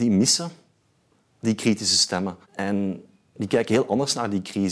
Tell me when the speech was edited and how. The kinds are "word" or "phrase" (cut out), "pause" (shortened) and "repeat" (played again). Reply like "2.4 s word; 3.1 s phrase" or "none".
2.4 s pause

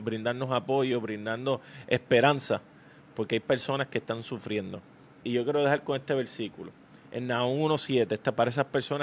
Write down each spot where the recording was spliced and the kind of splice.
none

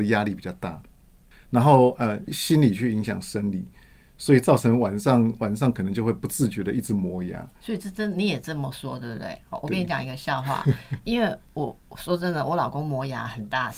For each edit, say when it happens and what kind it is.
7.6 s pause

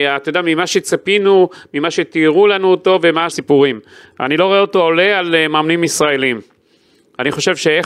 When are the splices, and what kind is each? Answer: 3.3 s phrase

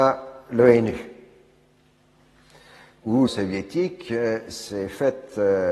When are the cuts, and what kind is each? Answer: 3.3 s word

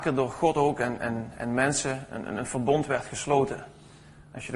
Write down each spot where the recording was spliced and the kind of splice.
none

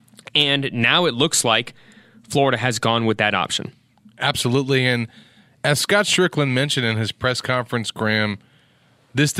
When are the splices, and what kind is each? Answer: none

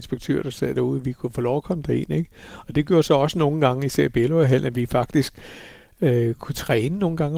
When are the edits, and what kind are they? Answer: none

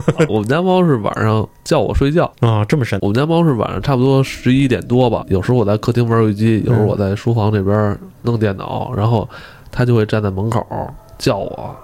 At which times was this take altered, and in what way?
2.3 s pause

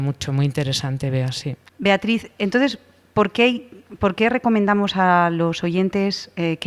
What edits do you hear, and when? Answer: none

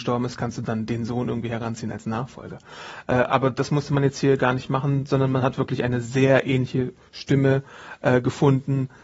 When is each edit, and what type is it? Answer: none

